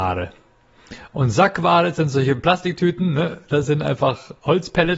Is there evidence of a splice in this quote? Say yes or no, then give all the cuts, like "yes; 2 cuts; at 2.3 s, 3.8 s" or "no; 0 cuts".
no; 0 cuts